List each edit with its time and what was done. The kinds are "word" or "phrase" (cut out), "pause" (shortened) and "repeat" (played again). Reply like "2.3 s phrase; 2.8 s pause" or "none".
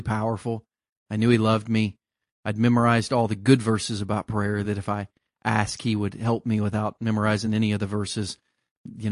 none